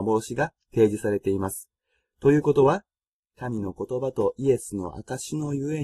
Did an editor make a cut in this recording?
no; 0 cuts

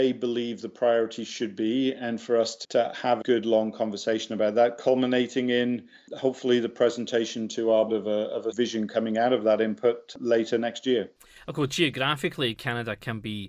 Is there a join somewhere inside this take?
yes; 3 cuts; at 3.2 s, 7.9 s, 8.5 s

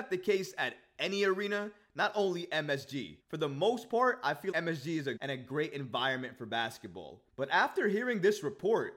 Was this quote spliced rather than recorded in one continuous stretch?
yes; 4 cuts; at 3.2 s, 4.5 s, 5.2 s, 7.3 s

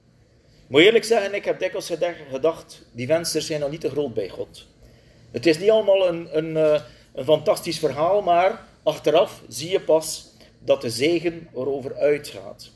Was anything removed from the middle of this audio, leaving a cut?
no; 0 cuts

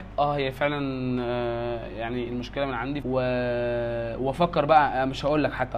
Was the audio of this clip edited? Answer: yes; 1 cut; at 3.0 s

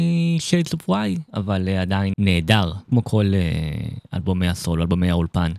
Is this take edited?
yes; 2 cuts; at 2.1 s, 2.8 s

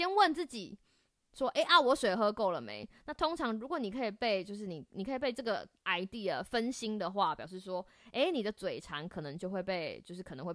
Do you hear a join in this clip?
yes; 1 cut; at 5.8 s

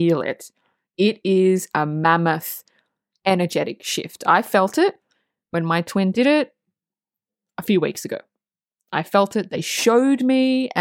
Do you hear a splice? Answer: no; 0 cuts

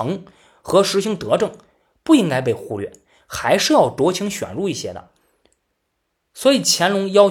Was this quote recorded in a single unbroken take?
yes; 0 cuts

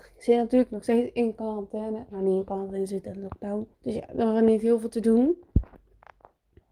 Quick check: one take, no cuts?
no; 1 cut; at 3.7 s

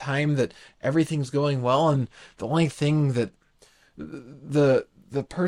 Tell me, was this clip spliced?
no; 0 cuts

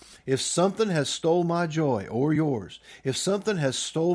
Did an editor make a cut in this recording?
no; 0 cuts

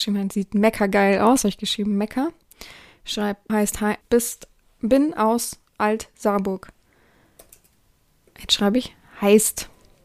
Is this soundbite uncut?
no; 2 cuts; at 3.5 s, 4.0 s

